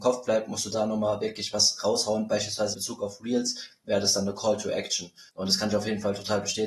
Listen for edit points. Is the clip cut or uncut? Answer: cut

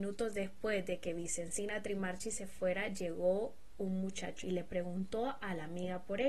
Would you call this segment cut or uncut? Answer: cut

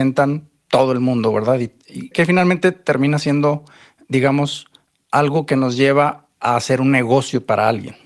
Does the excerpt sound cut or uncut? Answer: cut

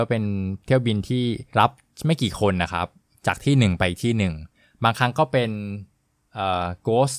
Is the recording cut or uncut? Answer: cut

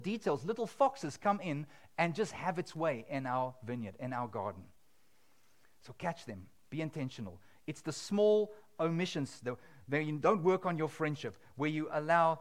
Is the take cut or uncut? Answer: uncut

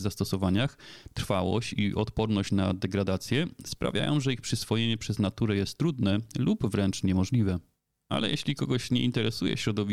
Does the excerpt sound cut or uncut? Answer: uncut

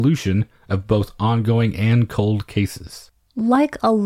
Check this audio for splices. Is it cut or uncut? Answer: uncut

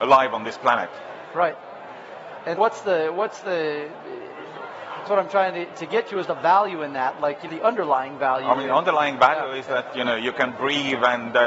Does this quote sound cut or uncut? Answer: cut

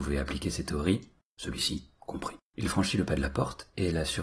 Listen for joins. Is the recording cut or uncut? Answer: cut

